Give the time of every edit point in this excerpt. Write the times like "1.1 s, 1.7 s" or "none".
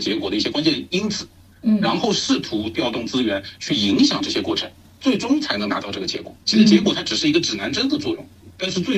6.4 s